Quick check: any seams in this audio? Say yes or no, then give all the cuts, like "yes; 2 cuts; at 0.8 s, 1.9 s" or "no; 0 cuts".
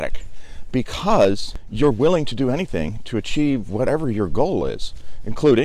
no; 0 cuts